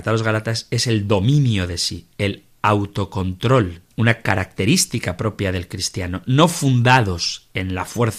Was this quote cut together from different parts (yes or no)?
no